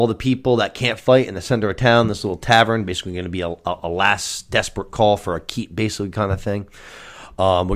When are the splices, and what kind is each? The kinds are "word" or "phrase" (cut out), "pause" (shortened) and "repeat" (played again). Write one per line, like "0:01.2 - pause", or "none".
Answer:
none